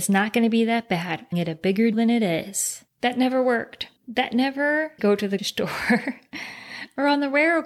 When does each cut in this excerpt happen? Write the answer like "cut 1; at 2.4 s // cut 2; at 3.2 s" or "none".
cut 1; at 1.3 s // cut 2; at 1.9 s // cut 3; at 2.9 s // cut 4; at 4.0 s // cut 5; at 5.0 s // cut 6; at 5.4 s